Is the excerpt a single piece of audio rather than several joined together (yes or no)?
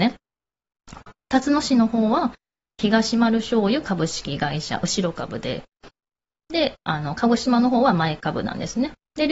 yes